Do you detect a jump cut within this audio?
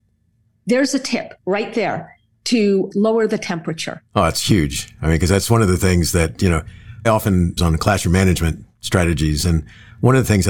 yes; 5 cuts; at 1.4 s, 2.9 s, 4.1 s, 7.0 s, 7.6 s

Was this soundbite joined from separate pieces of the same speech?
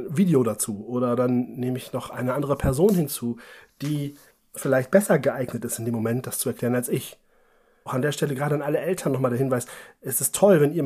yes; 1 cut; at 7.9 s

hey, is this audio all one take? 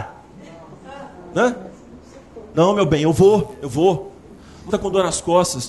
no; 1 cut; at 4.7 s

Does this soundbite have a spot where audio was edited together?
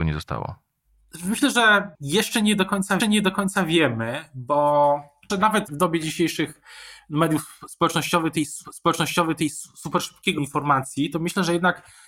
yes; 6 cuts; at 1.9 s, 3.0 s, 5.3 s, 5.7 s, 8.6 s, 10.4 s

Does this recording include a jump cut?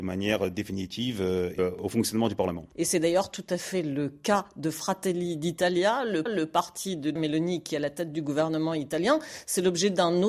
yes; 3 cuts; at 1.6 s, 6.3 s, 7.2 s

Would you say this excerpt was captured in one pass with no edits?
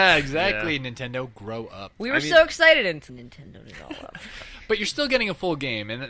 no; 1 cut; at 3.1 s

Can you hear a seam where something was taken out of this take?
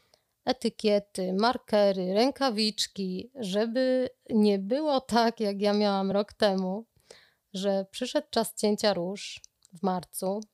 no; 0 cuts

